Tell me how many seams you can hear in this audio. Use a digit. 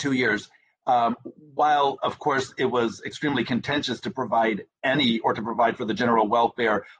0